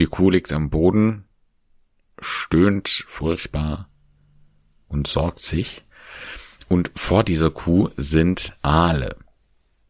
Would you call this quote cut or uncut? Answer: uncut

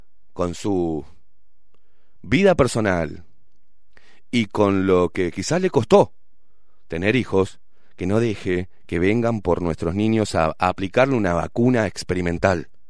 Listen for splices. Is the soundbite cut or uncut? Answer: uncut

